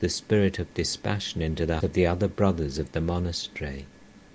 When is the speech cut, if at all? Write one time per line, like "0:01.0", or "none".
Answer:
0:01.8